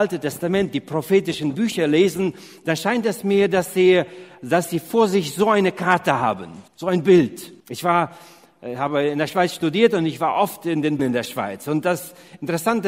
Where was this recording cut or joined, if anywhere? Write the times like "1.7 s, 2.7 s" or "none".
6.7 s, 7.6 s, 11.0 s